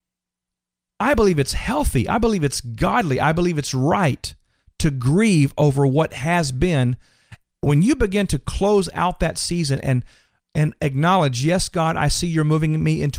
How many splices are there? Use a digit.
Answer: 0